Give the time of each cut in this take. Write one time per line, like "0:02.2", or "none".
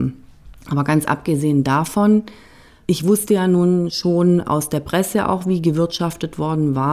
none